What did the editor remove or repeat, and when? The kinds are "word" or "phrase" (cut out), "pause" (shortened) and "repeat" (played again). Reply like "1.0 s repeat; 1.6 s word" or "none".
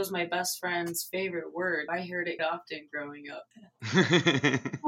1.9 s word; 2.4 s word; 3.5 s pause